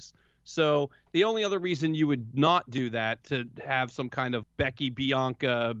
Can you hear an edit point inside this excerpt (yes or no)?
yes